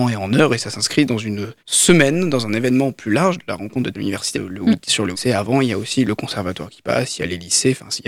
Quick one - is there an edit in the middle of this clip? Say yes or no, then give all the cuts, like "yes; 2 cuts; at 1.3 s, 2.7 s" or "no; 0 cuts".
yes; 4 cuts; at 1.6 s, 3.9 s, 4.3 s, 5.1 s